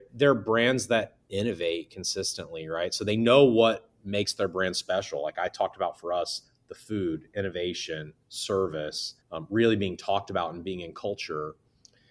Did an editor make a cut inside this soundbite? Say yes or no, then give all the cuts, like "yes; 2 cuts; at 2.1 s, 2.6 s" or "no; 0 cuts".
yes; 1 cut; at 9.2 s